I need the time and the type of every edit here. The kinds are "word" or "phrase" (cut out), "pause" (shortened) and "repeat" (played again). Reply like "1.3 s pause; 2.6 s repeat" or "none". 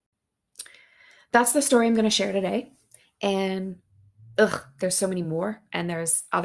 none